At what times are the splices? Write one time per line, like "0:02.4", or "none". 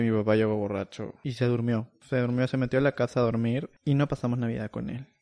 none